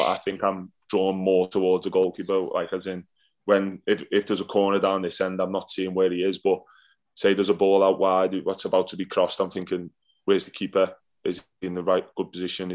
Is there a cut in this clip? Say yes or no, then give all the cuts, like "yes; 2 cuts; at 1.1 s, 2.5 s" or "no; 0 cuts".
no; 0 cuts